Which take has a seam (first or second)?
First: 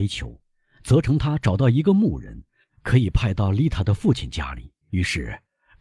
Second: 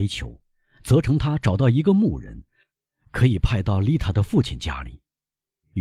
first